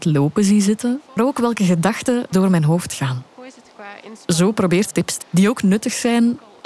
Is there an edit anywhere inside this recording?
yes; 4 cuts; at 1.2 s, 2.3 s, 4.9 s, 5.2 s

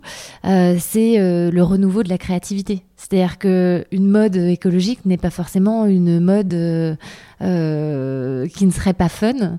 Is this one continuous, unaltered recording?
yes; 0 cuts

